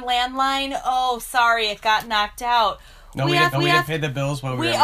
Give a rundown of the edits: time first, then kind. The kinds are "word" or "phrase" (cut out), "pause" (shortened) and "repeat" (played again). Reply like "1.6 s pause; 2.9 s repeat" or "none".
3.5 s repeat